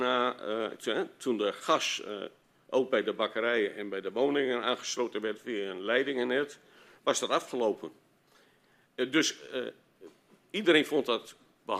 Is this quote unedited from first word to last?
yes; 0 cuts

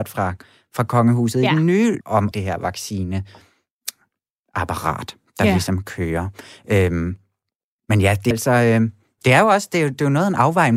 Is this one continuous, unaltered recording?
no; 3 cuts; at 2.0 s, 2.3 s, 8.3 s

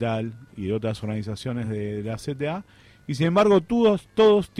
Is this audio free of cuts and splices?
yes; 0 cuts

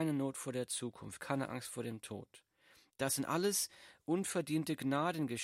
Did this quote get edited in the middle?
no; 0 cuts

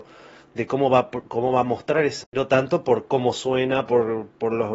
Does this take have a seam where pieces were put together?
yes; 1 cut; at 2.2 s

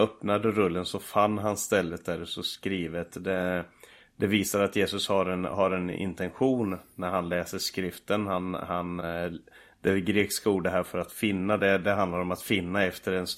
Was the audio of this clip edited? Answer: no; 0 cuts

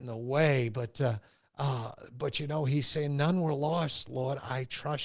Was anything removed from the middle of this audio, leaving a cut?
no; 0 cuts

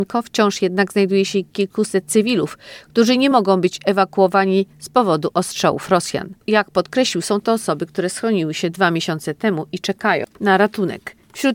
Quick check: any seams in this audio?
no; 0 cuts

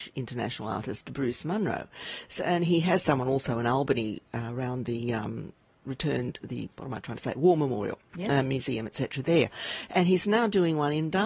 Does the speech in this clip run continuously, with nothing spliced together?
yes; 0 cuts

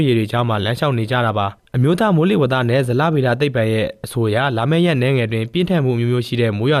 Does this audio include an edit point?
no; 0 cuts

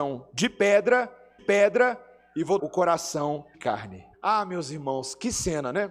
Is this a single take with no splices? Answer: no; 4 cuts; at 1.4 s, 2.6 s, 3.5 s, 4.1 s

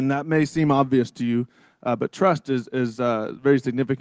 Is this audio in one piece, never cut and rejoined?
yes; 0 cuts

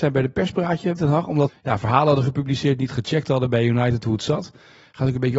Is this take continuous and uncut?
no; 2 cuts; at 1.0 s, 1.5 s

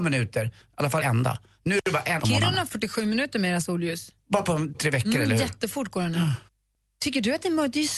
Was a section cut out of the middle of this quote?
yes; 5 cuts; at 1.0 s, 2.2 s, 2.7 s, 4.7 s, 6.5 s

